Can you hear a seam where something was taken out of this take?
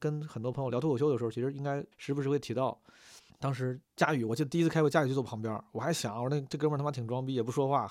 yes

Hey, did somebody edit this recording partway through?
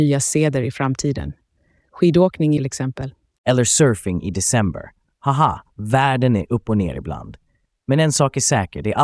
yes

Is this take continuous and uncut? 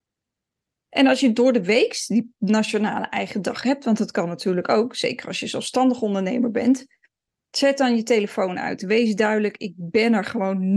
yes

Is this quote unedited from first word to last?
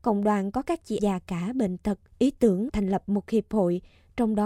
no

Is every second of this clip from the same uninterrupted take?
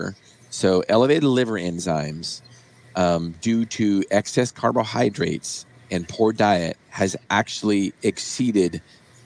yes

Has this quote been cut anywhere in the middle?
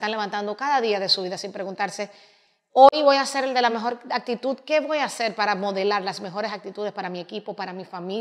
no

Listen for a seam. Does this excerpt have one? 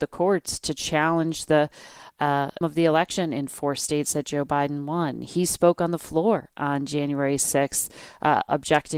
yes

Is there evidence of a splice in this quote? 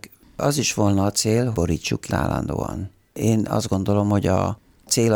yes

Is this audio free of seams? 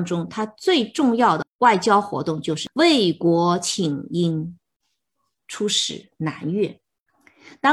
yes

